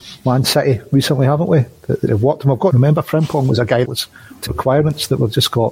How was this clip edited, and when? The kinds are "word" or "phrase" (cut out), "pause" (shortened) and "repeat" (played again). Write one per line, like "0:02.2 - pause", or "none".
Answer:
0:02.1 - word
0:02.7 - word
0:03.8 - word
0:04.5 - word